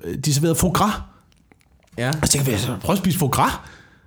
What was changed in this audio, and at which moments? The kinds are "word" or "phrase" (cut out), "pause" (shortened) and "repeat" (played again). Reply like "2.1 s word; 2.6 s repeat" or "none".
none

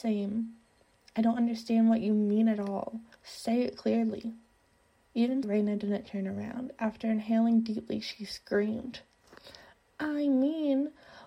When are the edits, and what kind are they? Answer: 5.4 s word

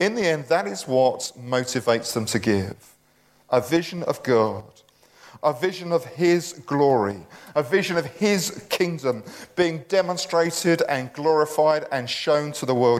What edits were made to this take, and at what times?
none

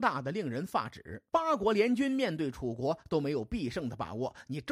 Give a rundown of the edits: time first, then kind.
1.3 s pause

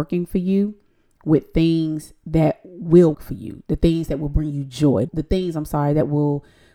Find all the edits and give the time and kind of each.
3.1 s word; 5.1 s phrase

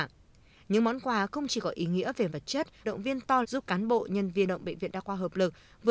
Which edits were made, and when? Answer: 2.3 s word; 2.8 s phrase; 3.4 s word; 4.5 s phrase

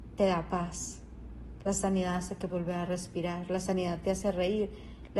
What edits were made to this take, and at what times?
2.5 s word

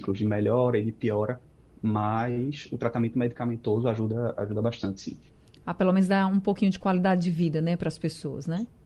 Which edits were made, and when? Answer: none

